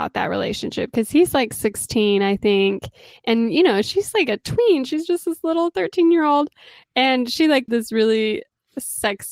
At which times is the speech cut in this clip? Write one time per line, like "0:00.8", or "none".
0:07.7